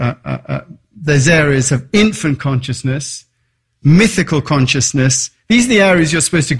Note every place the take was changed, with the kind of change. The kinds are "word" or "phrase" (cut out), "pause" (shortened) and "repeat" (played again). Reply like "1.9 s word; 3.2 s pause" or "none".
none